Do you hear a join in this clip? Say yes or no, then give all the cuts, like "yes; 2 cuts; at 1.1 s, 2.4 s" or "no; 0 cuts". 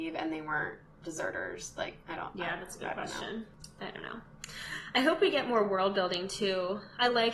yes; 1 cut; at 2.0 s